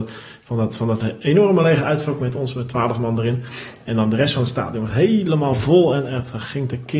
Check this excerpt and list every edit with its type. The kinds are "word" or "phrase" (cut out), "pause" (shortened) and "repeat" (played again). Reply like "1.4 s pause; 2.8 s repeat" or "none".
none